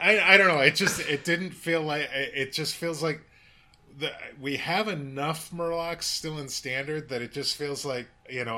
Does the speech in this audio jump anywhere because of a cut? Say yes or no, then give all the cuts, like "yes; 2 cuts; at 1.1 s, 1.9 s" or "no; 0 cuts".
no; 0 cuts